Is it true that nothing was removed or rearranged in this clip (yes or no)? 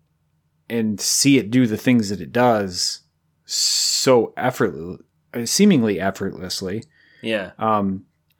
yes